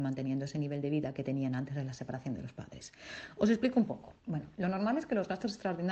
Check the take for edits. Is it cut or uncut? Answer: cut